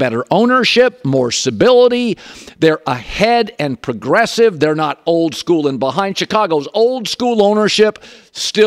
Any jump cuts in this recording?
no; 0 cuts

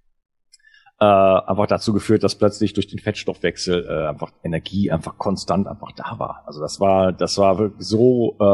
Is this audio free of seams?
yes; 0 cuts

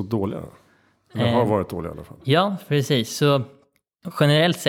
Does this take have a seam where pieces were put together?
no; 0 cuts

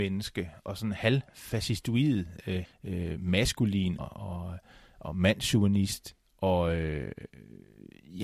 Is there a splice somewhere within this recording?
yes; 2 cuts; at 2.6 s, 4.0 s

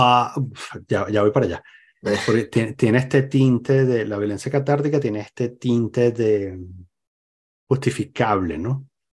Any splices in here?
no; 0 cuts

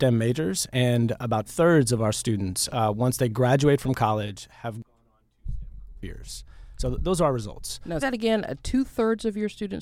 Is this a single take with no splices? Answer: no; 2 cuts; at 1.5 s, 8.0 s

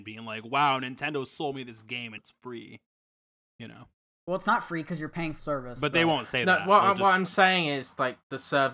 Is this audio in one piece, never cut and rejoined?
no; 2 cuts; at 2.2 s, 5.4 s

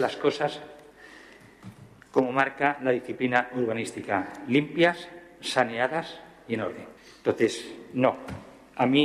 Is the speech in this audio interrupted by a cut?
yes; 1 cut; at 7.0 s

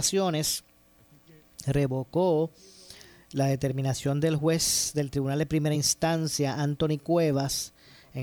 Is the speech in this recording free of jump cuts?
yes; 0 cuts

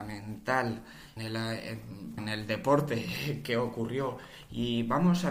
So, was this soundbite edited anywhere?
yes; 2 cuts; at 1.2 s, 2.2 s

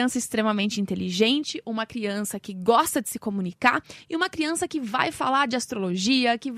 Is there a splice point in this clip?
no; 0 cuts

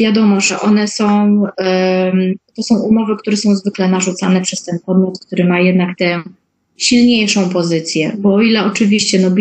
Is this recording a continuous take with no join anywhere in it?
yes; 0 cuts

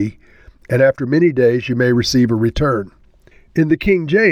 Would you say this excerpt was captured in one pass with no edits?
no; 1 cut; at 3.3 s

